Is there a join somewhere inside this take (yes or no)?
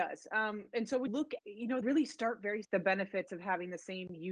yes